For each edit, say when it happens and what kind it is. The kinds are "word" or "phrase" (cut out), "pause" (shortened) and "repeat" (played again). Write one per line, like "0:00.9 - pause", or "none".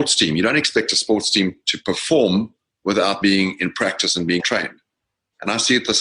0:03.2 - word
0:04.4 - word